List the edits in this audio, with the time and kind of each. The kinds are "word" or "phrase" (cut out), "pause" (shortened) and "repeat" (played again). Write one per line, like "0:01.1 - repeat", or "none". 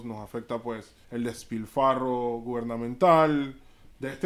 0:01.0 - pause